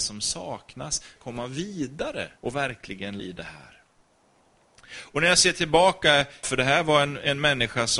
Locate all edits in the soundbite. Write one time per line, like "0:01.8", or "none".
0:01.2
0:02.4
0:03.2
0:06.4